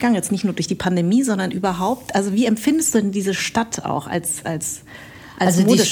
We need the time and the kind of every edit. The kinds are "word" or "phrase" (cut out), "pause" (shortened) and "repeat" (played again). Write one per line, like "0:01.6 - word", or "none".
none